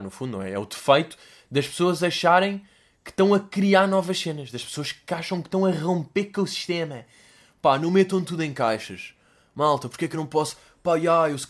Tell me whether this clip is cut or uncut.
uncut